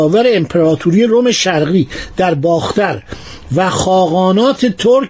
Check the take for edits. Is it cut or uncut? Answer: uncut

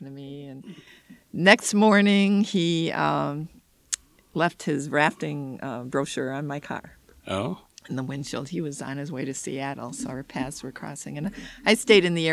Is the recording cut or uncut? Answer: uncut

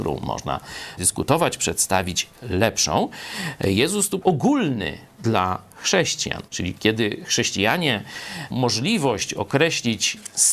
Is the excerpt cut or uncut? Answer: cut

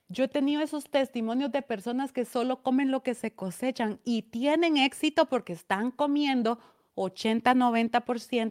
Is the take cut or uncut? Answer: uncut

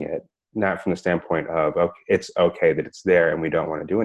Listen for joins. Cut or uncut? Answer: uncut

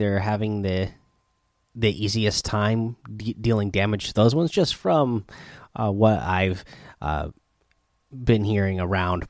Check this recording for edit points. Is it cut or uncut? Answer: uncut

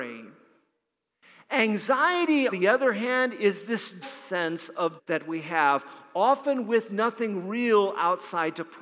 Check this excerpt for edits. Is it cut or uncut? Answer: cut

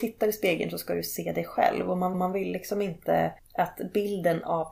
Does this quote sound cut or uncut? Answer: cut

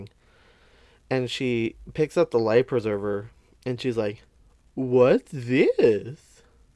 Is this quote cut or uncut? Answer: uncut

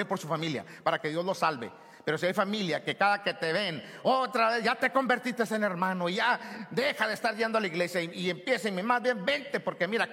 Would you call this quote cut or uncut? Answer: uncut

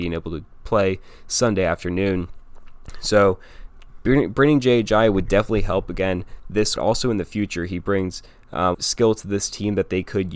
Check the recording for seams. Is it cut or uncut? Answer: cut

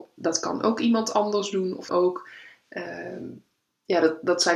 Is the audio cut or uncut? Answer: cut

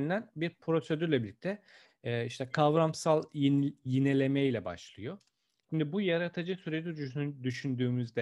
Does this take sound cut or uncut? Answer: uncut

